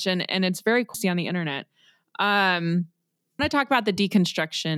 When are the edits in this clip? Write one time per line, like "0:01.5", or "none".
0:00.9
0:03.4